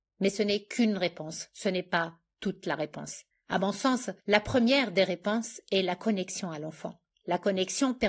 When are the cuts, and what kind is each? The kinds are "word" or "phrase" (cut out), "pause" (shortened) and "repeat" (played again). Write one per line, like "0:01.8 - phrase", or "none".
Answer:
0:03.3 - pause
0:04.2 - pause
0:07.1 - pause